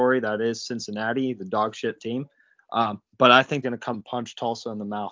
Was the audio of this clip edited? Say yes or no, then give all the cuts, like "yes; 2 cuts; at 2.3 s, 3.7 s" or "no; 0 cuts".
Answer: yes; 4 cuts; at 2.0 s, 3.1 s, 3.6 s, 3.9 s